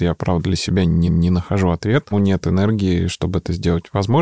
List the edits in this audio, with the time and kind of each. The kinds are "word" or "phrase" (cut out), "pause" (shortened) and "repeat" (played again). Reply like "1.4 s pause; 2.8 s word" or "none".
1.1 s repeat; 2.1 s word